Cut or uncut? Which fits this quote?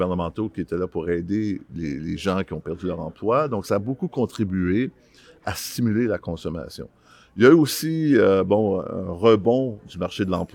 uncut